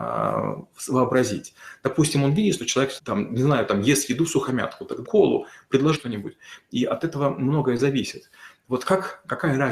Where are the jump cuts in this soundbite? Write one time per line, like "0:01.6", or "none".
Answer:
0:03.0
0:05.0
0:05.9